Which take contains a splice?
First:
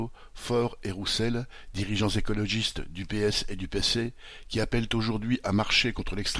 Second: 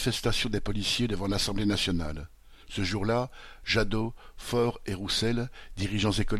second; 1 cut; at 2.6 s

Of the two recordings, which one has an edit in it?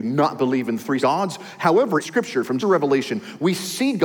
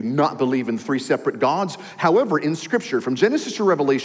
first; 3 cuts; at 1.0 s, 2.0 s, 2.6 s

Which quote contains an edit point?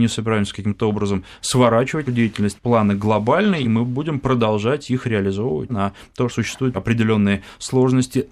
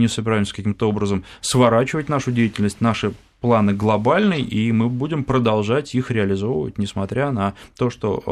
first; 6 cuts; at 2.1 s, 2.6 s, 3.6 s, 5.7 s, 6.3 s, 6.7 s

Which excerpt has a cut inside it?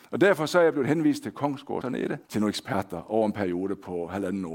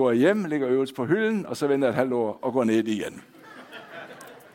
first; 2 cuts; at 1.8 s, 2.2 s

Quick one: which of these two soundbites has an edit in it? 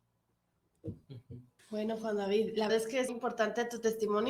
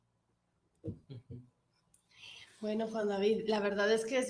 first; 3 cuts; at 1.6 s, 2.7 s, 3.1 s

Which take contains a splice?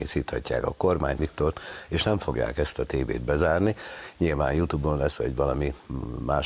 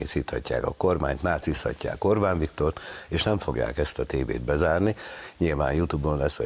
first; 1 cut; at 1.2 s

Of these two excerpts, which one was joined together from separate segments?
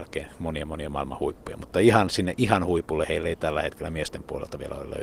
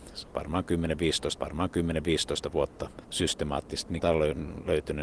second; 3 cuts; at 1.4 s, 3.0 s, 4.0 s

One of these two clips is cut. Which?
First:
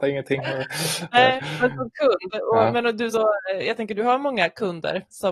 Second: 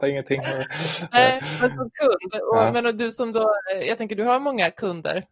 first; 1 cut; at 3.1 s

